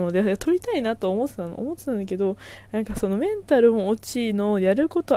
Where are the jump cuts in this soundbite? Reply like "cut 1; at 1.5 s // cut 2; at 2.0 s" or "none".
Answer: none